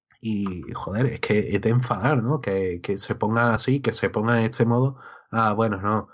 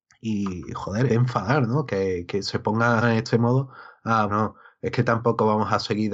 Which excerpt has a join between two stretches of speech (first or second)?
second